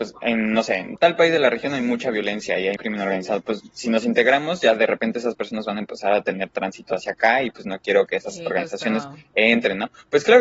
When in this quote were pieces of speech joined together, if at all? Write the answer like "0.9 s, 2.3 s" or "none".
2.8 s